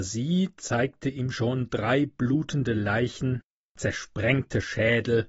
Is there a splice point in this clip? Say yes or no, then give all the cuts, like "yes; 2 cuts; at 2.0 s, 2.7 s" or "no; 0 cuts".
no; 0 cuts